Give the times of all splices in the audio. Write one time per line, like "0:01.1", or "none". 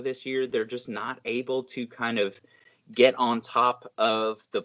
none